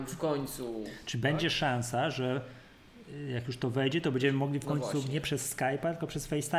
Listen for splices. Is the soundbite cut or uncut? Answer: uncut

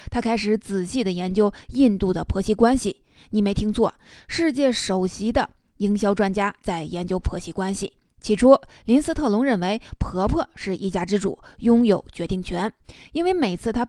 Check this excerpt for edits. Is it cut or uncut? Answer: uncut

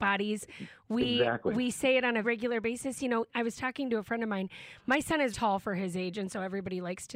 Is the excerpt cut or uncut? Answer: cut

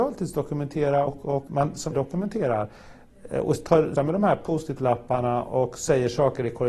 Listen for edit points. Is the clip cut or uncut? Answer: cut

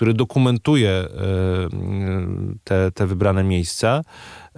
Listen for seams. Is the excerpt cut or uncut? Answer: uncut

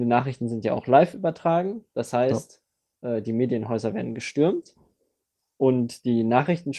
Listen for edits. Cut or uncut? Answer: uncut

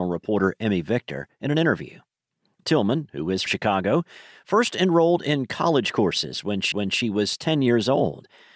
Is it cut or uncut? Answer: cut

